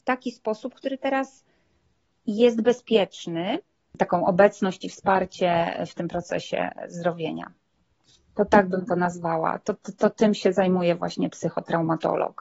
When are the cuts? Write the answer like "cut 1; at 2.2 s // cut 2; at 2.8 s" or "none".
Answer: none